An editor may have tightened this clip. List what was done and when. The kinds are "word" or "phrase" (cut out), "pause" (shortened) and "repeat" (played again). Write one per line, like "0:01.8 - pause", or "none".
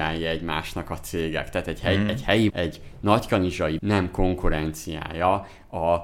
0:02.5 - word
0:03.8 - word